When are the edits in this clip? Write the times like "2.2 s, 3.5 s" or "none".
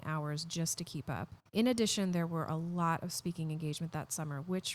1.5 s